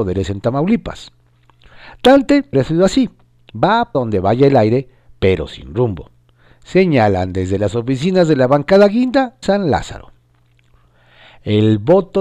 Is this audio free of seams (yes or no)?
no